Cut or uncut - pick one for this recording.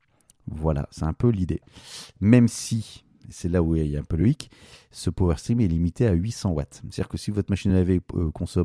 uncut